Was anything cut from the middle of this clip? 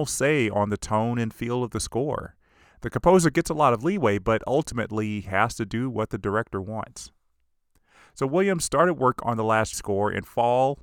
yes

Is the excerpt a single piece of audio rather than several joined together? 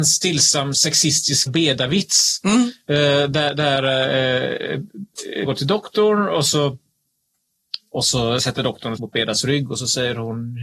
no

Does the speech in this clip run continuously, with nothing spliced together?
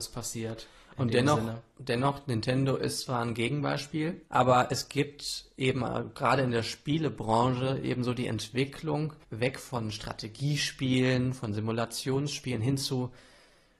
no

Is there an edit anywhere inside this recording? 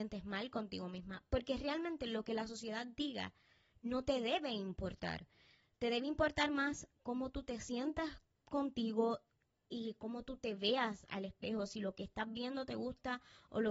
no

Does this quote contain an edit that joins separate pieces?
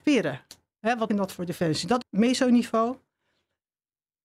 yes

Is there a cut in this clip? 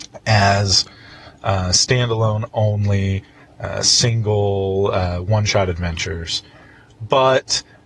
no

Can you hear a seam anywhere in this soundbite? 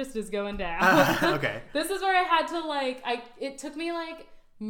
no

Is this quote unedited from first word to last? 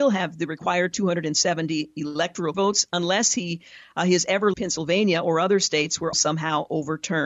no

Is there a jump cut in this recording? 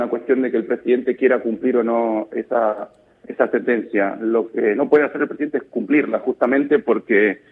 no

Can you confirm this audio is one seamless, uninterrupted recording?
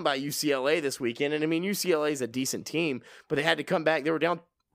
yes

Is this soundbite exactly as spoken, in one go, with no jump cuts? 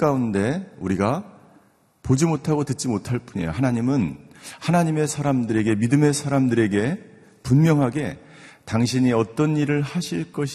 yes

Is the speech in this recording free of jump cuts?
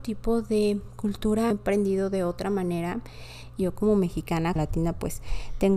no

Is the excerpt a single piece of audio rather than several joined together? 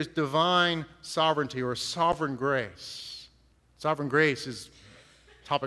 no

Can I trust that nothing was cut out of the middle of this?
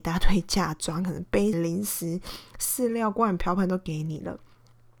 no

